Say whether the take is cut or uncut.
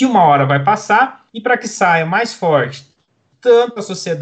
cut